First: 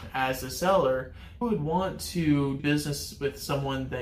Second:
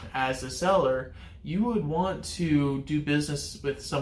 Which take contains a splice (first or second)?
first